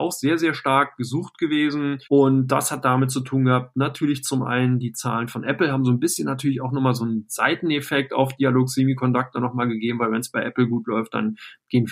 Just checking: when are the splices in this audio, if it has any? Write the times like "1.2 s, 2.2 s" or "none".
2.0 s